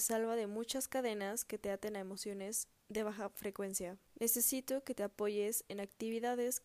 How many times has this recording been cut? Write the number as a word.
one